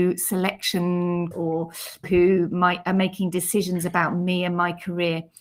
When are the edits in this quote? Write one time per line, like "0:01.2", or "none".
0:01.3
0:02.0

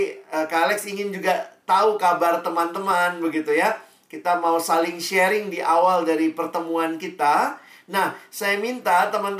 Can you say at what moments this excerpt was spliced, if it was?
none

